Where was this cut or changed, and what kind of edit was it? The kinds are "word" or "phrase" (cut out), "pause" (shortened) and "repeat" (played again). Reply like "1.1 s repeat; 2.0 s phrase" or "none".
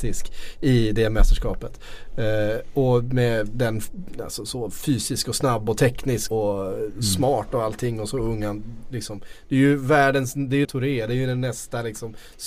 6.3 s word; 10.6 s phrase